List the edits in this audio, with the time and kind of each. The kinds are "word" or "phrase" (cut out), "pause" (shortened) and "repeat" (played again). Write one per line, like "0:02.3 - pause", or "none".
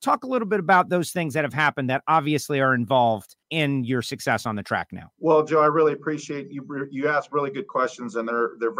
0:03.4 - pause
0:05.1 - pause